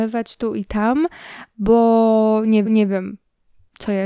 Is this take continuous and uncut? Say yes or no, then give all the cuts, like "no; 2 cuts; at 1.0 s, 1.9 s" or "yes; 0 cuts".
no; 1 cut; at 2.7 s